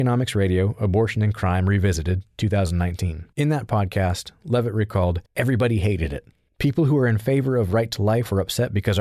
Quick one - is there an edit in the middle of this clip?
yes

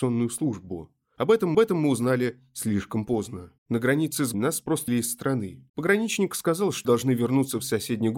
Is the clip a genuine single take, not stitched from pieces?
no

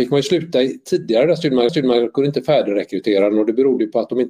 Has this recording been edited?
yes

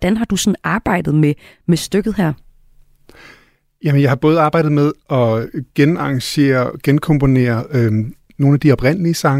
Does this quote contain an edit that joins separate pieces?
no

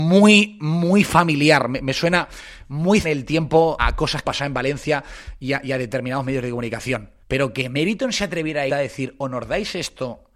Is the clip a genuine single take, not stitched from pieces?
no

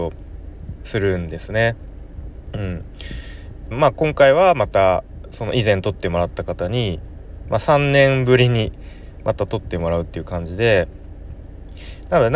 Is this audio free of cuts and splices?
no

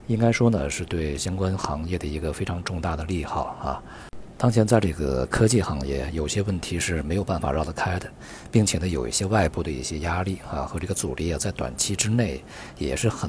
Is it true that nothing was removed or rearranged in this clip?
yes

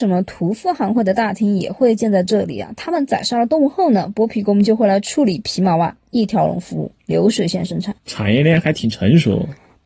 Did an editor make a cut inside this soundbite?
yes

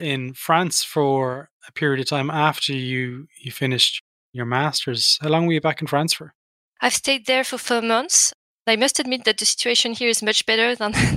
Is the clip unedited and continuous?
yes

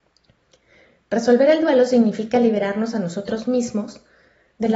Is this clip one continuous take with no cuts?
yes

